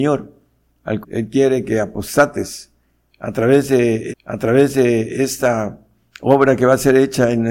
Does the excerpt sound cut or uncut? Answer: cut